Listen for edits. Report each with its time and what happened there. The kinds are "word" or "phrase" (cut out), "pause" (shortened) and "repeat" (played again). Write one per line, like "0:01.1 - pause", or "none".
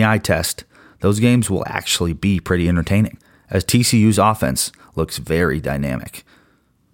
none